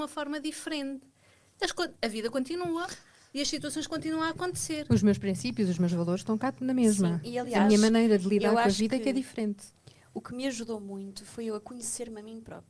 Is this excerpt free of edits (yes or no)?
yes